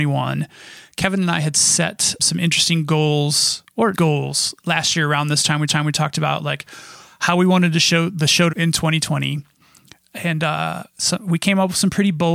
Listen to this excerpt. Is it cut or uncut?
cut